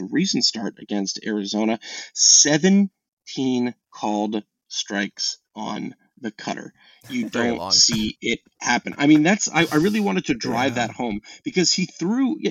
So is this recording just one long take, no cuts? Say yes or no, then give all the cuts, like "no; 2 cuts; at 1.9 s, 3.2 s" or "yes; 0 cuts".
no; 3 cuts; at 3.8 s, 5.5 s, 7.3 s